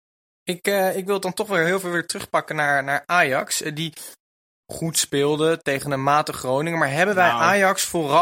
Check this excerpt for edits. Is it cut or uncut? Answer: uncut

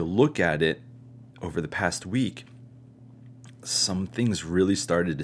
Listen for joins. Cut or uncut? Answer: cut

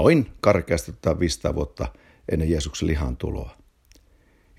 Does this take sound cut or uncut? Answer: uncut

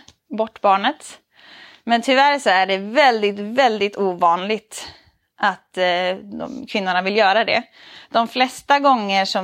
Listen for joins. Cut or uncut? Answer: uncut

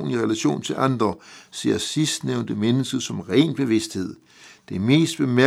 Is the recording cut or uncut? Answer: uncut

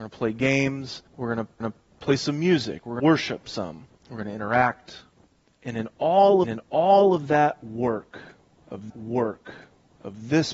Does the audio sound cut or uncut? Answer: cut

